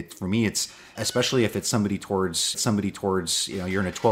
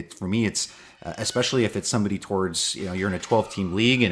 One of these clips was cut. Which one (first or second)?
first